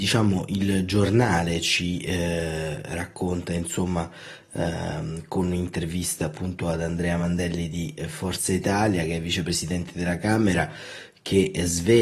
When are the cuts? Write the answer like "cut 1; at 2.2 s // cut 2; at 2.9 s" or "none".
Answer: none